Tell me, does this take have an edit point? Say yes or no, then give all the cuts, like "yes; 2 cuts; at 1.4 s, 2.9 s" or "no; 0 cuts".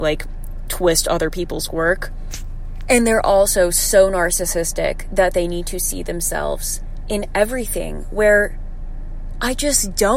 no; 0 cuts